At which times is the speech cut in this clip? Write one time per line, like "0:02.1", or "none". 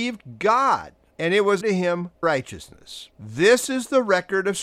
0:01.1
0:01.6
0:02.2
0:03.1